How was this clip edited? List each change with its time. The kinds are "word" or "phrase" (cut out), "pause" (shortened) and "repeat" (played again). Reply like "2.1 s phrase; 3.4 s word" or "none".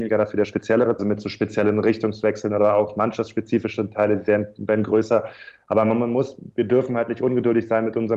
1.0 s phrase